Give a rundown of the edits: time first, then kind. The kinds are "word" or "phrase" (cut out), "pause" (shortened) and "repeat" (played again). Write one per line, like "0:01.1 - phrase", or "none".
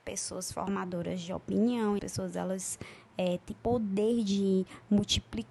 0:02.0 - phrase
0:03.5 - word